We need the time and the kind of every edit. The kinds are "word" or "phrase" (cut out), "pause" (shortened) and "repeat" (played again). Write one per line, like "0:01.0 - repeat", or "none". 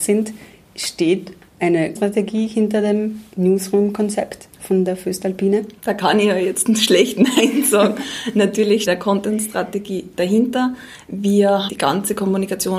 0:02.0 - word
0:05.8 - pause
0:08.9 - word
0:11.7 - word